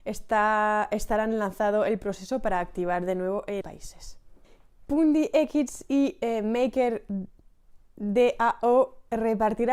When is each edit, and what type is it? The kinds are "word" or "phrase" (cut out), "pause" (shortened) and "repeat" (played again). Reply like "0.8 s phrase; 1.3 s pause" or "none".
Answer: 3.6 s phrase